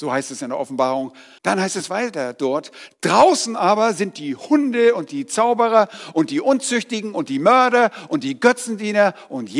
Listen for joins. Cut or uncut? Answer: cut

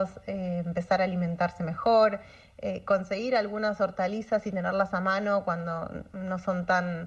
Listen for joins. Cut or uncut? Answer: uncut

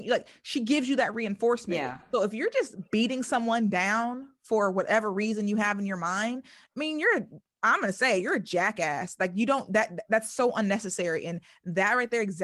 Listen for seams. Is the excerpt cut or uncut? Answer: uncut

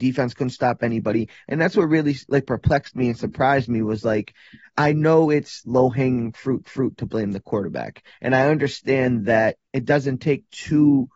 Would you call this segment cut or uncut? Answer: cut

